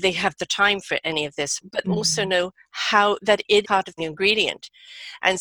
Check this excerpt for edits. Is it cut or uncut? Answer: cut